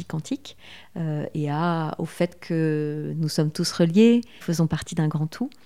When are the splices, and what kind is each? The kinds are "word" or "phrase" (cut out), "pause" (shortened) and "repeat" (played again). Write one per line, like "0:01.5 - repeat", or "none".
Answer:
0:04.4 - phrase